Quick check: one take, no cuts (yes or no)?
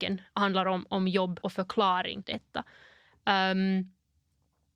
no